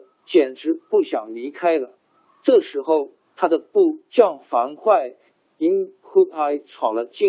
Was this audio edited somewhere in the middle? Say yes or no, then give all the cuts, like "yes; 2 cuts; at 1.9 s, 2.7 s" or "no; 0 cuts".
no; 0 cuts